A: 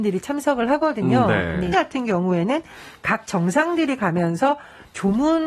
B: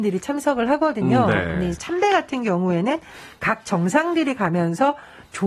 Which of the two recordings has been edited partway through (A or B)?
A